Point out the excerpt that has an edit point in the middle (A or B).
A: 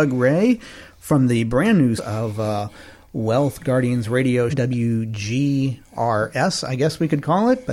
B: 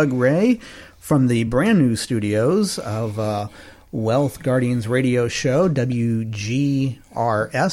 A